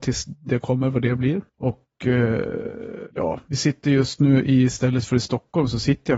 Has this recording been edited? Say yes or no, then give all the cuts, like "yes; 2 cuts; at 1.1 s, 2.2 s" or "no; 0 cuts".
yes; 2 cuts; at 1.5 s, 3.1 s